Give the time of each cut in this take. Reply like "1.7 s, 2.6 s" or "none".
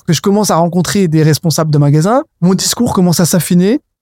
2.3 s